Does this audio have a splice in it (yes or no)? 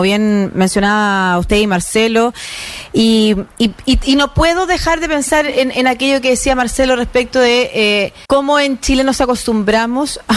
yes